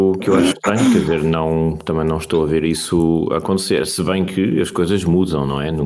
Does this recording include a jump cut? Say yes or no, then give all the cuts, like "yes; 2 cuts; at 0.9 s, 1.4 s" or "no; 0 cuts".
no; 0 cuts